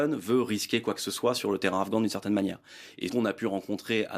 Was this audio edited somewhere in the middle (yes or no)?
yes